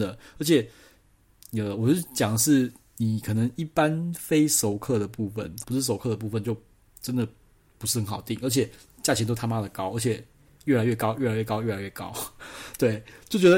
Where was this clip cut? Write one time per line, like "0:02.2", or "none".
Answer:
0:05.6